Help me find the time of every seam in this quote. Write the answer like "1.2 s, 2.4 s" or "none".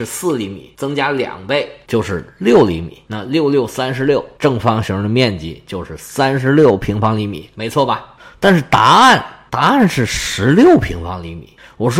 none